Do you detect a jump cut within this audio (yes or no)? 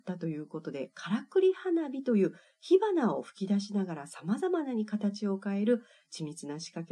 no